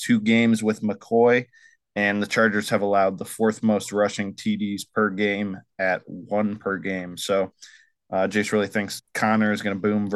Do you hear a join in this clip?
no; 0 cuts

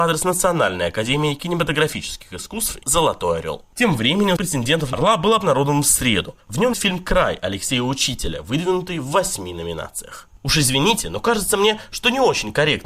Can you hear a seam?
yes; 5 cuts; at 2.8 s, 4.4 s, 4.9 s, 6.7 s, 10.4 s

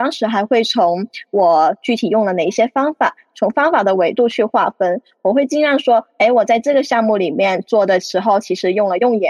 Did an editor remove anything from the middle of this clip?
no; 0 cuts

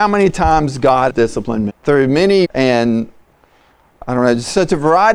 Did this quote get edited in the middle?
yes; 3 cuts; at 1.1 s, 1.7 s, 2.4 s

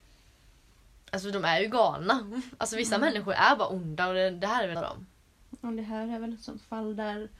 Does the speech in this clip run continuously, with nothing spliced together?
no; 1 cut; at 4.7 s

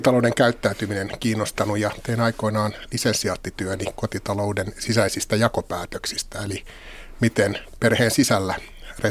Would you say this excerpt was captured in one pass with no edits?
yes; 0 cuts

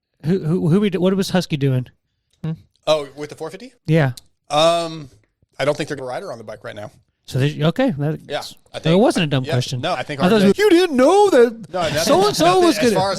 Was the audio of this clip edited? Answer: yes; 6 cuts; at 2.3 s, 3.8 s, 6.0 s, 8.0 s, 9.9 s, 10.5 s

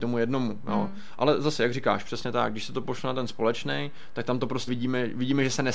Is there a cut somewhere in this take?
yes; 1 cut; at 4.7 s

